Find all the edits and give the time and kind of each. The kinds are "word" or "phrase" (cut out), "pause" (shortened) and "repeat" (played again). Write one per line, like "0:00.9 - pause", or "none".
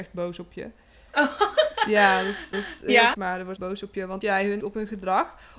0:02.5 - repeat
0:03.1 - word
0:03.6 - word
0:04.2 - word
0:04.6 - word